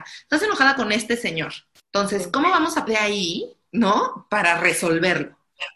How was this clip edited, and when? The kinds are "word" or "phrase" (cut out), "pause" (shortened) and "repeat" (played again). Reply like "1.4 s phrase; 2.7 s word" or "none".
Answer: 1.8 s pause; 2.9 s word

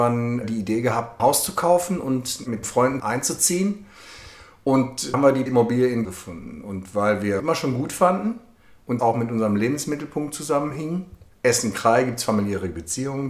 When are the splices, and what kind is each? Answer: 1.2 s word; 2.6 s word; 3.0 s word; 5.1 s word; 5.5 s word; 6.0 s word; 7.4 s word; 9.0 s word

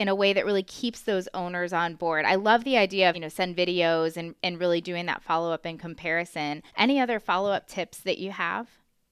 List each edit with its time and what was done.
3.1 s phrase; 6.7 s pause

